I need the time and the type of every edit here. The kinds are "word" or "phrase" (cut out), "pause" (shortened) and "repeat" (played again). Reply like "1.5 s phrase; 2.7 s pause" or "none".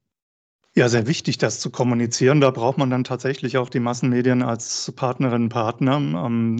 none